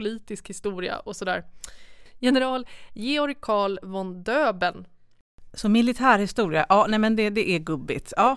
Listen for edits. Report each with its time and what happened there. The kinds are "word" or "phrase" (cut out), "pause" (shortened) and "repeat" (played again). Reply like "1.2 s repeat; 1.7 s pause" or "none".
none